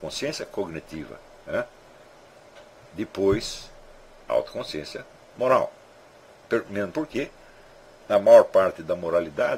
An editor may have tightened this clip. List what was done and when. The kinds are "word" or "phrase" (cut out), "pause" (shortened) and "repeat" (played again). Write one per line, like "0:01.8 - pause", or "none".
none